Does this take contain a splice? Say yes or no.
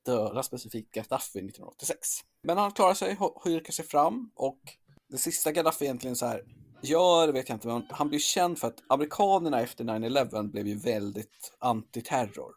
no